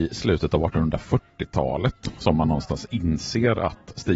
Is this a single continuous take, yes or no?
yes